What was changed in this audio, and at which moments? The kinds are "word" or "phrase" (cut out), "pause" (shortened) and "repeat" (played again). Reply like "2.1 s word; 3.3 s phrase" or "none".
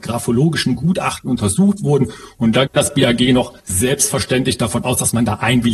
2.7 s word; 3.6 s pause